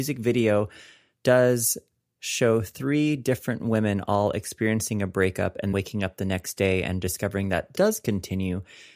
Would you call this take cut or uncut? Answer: cut